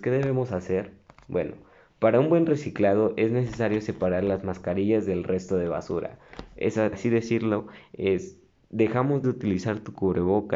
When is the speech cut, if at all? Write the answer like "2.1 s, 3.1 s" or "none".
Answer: 6.9 s, 9.2 s